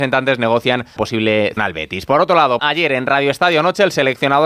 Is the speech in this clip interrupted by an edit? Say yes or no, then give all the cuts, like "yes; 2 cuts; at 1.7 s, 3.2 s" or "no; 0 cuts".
yes; 3 cuts; at 1.0 s, 1.6 s, 2.6 s